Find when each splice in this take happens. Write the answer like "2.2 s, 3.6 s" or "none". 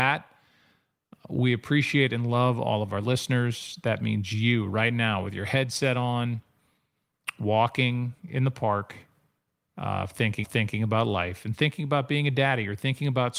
10.4 s